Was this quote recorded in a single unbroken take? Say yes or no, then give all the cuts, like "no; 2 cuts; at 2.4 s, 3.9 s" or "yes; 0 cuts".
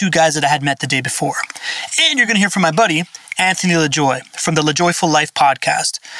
yes; 0 cuts